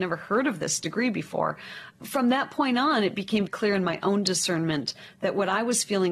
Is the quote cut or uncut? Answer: cut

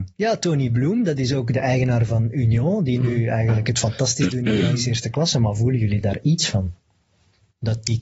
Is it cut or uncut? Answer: uncut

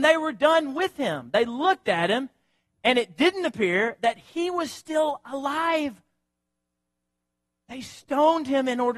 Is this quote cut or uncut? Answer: uncut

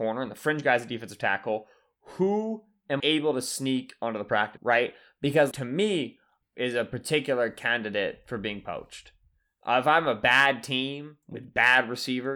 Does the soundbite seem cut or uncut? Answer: cut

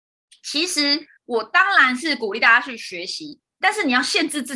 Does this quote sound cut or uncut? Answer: cut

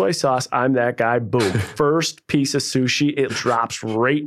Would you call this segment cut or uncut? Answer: cut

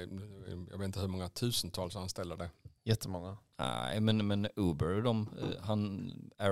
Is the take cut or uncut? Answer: cut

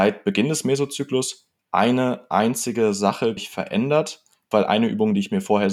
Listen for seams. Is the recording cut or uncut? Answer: cut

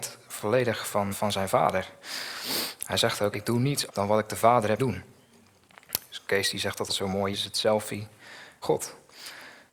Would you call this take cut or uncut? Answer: cut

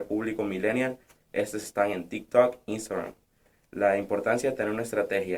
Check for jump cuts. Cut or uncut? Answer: uncut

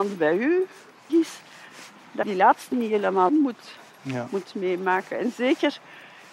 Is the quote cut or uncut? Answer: cut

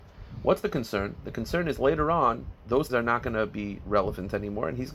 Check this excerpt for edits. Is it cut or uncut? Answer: cut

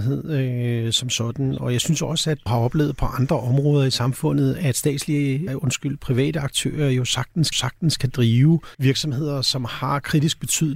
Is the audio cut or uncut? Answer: cut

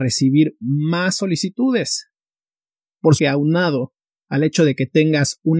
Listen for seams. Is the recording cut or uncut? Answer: cut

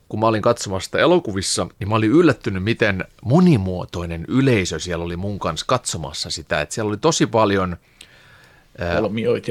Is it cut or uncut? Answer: cut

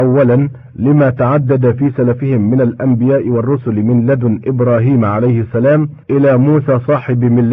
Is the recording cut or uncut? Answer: cut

